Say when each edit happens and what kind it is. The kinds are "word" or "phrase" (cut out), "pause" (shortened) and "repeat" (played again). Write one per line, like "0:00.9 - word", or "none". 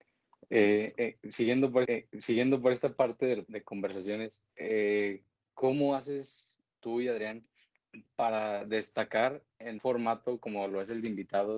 0:01.8 - repeat
0:03.5 - phrase
0:04.5 - pause
0:09.8 - word